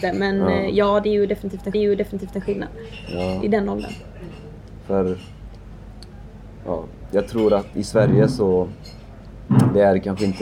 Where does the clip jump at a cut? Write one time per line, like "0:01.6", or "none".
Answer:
0:01.7
0:07.7